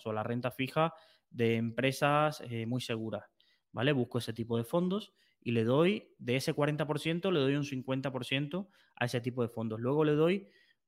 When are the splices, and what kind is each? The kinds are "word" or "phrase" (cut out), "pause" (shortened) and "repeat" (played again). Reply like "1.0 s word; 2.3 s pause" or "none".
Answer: none